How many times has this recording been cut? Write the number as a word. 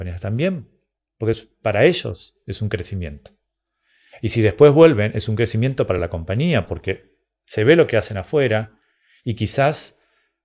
zero